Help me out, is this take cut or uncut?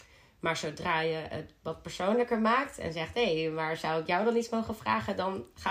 uncut